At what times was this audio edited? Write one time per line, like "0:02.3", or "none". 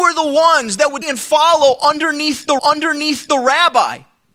0:01.0
0:02.6